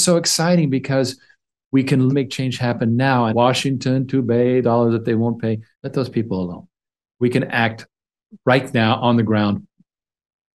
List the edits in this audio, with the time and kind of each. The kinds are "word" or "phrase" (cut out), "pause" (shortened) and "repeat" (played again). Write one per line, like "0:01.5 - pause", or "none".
0:02.1 - word
0:03.3 - phrase
0:04.6 - phrase
0:05.7 - pause

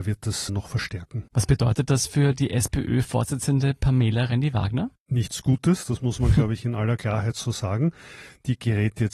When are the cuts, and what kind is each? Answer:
0:01.3 - pause
0:05.0 - pause

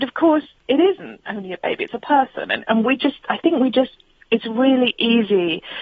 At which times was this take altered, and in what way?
none

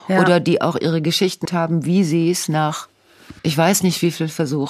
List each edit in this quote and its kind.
0:01.5 - word
0:03.4 - pause

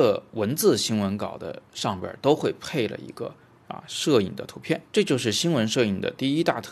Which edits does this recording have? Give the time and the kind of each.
0:04.9 - pause

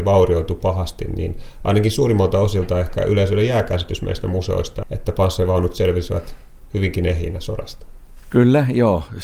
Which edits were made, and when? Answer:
0:04.8 - word

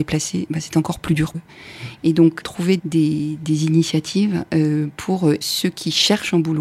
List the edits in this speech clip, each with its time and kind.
0:01.3 - word
0:02.4 - phrase
0:02.8 - word
0:05.4 - word

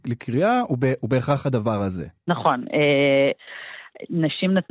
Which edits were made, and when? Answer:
0:02.2 - pause

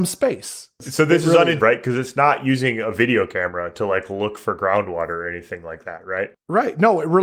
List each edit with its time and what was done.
0:01.6 - word

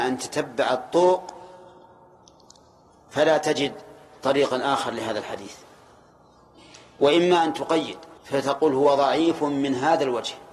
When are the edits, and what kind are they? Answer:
0:08.2 - pause

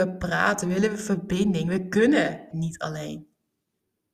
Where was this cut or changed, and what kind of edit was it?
0:02.5 - word

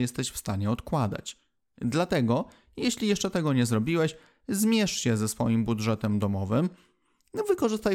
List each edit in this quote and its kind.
none

